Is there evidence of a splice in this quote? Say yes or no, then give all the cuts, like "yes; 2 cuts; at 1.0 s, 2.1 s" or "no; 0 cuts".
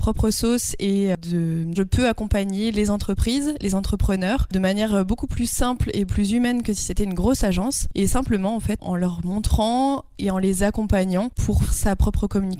yes; 3 cuts; at 1.7 s, 6.1 s, 11.6 s